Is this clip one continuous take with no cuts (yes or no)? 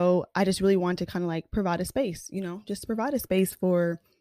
yes